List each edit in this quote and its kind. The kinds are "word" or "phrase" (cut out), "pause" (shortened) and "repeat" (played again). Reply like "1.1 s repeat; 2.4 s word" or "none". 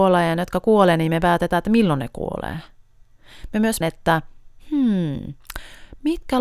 3.8 s word